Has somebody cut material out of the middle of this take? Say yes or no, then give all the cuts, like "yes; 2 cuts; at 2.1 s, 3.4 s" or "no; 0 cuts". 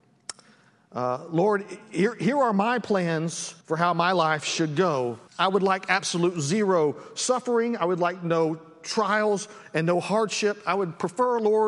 yes; 2 cuts; at 3.6 s, 5.3 s